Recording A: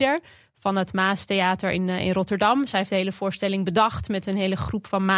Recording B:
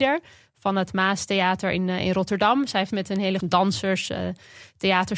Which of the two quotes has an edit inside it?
B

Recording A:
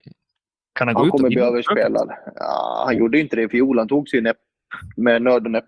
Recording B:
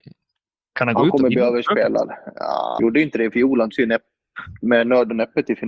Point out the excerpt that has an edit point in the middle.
B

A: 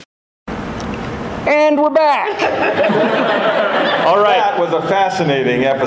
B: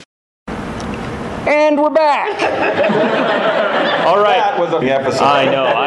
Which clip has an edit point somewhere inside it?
B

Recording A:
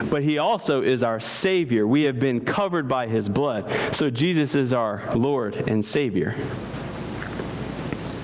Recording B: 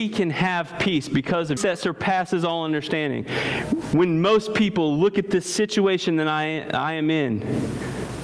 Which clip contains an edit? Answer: B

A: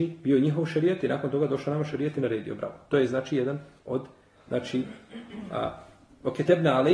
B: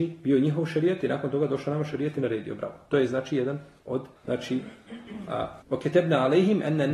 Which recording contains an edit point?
B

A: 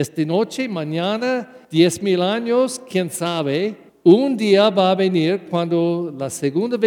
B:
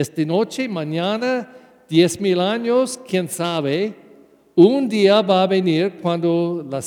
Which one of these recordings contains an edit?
A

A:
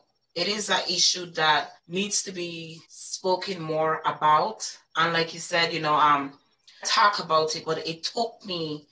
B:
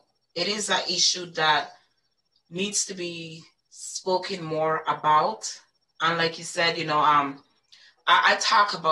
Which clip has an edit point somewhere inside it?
A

